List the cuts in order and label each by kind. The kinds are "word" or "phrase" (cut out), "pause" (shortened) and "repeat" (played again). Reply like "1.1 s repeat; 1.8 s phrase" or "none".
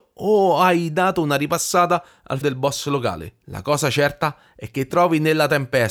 2.4 s word; 3.4 s pause; 4.9 s word